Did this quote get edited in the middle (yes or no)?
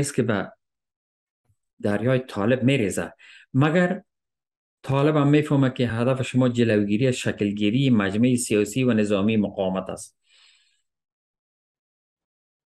no